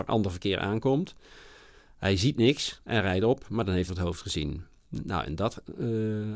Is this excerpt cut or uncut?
cut